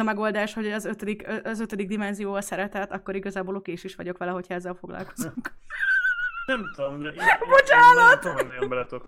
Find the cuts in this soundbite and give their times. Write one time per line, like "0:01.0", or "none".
none